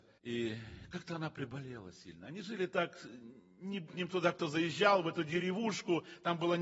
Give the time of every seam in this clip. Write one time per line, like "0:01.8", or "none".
0:03.9